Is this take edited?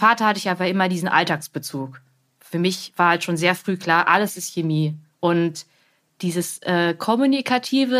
no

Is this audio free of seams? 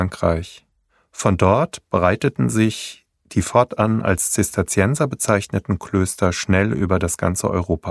yes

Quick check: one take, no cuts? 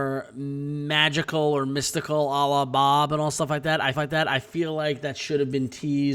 no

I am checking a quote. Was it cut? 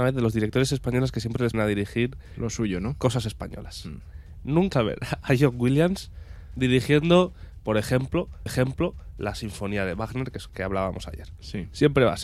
yes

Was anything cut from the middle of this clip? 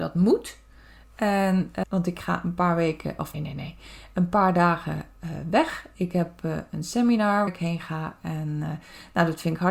yes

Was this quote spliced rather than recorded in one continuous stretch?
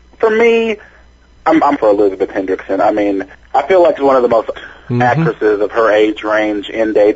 yes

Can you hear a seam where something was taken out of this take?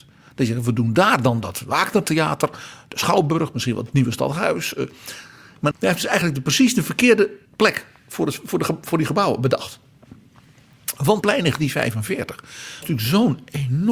yes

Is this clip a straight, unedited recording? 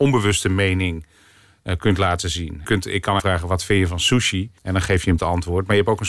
no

